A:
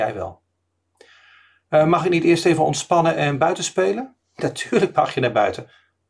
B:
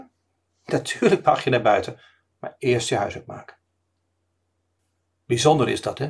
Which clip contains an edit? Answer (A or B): A